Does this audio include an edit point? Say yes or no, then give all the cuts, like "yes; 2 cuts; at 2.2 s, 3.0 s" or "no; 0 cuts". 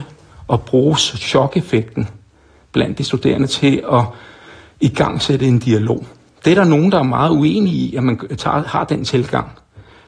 no; 0 cuts